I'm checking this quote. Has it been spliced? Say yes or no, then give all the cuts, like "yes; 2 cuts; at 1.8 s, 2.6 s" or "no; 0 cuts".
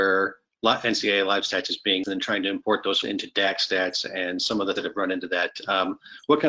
yes; 3 cuts; at 2.0 s, 3.0 s, 4.8 s